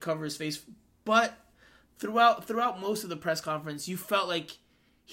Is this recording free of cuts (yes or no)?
yes